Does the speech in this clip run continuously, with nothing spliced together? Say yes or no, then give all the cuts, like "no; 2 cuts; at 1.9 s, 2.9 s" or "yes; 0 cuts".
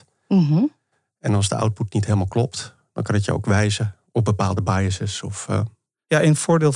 yes; 0 cuts